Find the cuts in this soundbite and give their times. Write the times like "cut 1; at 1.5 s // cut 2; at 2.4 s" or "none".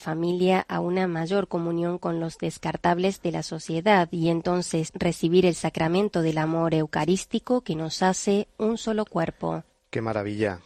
cut 1; at 4.9 s